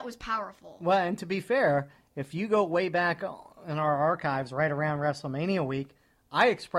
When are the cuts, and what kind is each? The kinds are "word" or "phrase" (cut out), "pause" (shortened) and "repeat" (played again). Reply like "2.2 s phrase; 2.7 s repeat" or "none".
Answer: none